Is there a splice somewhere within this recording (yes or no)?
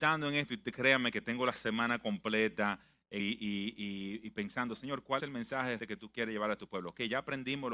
yes